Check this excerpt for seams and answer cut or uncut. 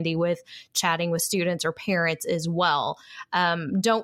uncut